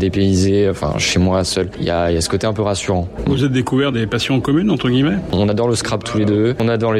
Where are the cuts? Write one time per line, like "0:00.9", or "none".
none